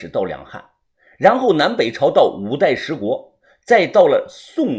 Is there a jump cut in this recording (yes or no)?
no